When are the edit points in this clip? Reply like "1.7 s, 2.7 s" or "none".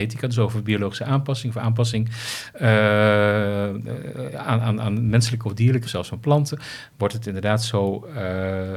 5.8 s